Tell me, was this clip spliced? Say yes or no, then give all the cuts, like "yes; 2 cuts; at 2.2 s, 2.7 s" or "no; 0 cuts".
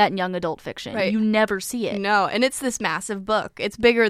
no; 0 cuts